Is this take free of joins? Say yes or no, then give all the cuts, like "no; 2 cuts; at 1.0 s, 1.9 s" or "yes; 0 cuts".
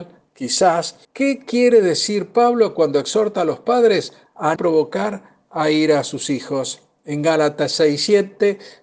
no; 2 cuts; at 1.0 s, 4.6 s